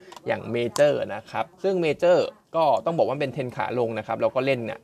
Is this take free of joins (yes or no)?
no